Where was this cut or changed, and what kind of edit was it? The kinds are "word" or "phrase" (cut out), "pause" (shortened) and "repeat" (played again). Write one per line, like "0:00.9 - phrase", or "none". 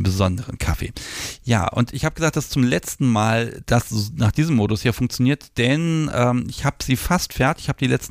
none